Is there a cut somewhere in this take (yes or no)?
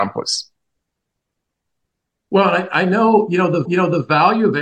yes